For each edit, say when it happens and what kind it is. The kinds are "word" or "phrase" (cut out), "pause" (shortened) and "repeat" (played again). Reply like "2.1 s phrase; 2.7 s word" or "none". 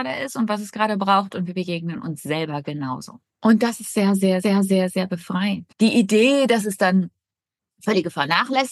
3.3 s pause; 4.4 s repeat; 5.7 s pause